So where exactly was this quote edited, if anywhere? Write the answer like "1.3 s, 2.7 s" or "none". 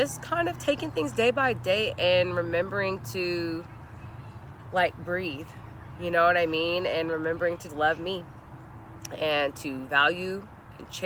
7.7 s